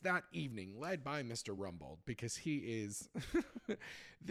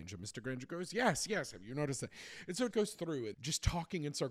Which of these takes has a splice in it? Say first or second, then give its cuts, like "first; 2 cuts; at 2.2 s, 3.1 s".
second; 2 cuts; at 2.7 s, 3.3 s